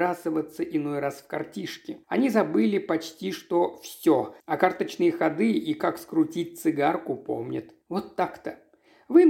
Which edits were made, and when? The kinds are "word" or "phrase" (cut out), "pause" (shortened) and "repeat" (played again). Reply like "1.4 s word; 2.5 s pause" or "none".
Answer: 2.0 s pause; 4.4 s pause; 7.8 s pause